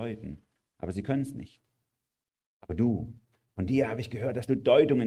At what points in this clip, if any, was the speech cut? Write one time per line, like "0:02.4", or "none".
none

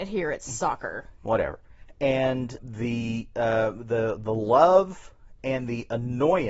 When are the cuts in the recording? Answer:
0:02.6

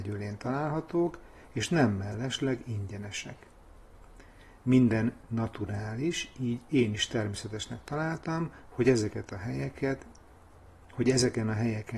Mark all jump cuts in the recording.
none

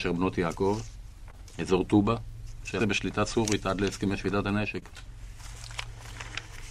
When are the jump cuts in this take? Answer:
0:02.8

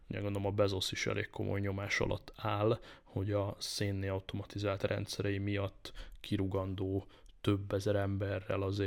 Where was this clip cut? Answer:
none

